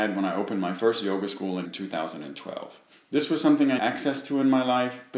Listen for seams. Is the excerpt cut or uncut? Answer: cut